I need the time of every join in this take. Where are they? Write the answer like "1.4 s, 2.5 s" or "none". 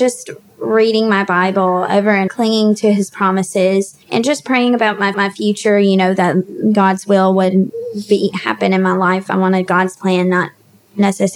2.3 s, 4.0 s, 5.1 s